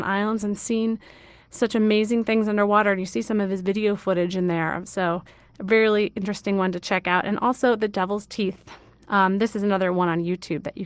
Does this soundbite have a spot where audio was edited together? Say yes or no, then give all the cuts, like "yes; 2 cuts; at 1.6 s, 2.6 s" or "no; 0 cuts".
no; 0 cuts